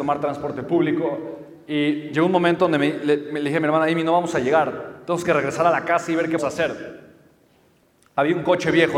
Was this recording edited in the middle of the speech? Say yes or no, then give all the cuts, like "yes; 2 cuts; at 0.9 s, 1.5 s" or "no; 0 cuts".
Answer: yes; 1 cut; at 6.4 s